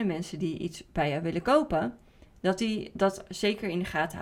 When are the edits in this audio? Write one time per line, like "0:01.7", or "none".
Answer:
none